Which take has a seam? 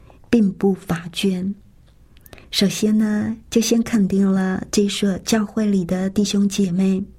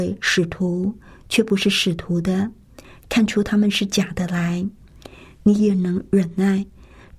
first; 1 cut; at 2.4 s

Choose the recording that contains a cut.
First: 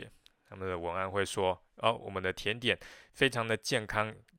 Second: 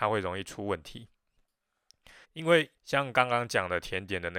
second; 2 cuts; at 2.2 s, 2.8 s

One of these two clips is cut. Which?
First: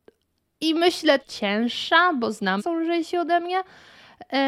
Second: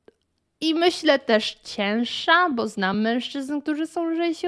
first; 2 cuts; at 1.2 s, 2.6 s

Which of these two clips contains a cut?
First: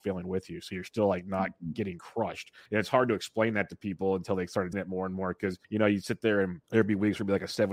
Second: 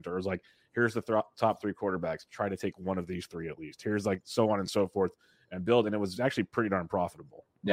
first; 4 cuts; at 2.7 s, 4.7 s, 5.6 s, 6.6 s

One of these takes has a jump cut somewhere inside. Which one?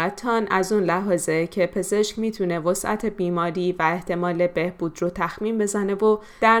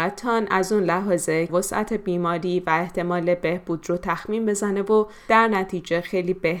second; 1 cut; at 1.5 s

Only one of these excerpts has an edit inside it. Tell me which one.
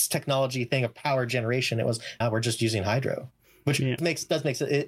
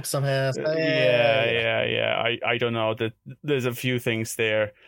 first; 2 cuts; at 2.2 s, 4.0 s

